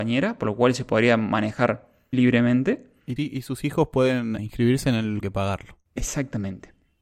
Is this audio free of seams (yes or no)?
no